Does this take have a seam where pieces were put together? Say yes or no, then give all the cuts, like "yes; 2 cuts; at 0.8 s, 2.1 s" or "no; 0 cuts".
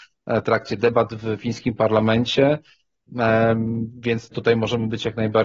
yes; 1 cut; at 4.3 s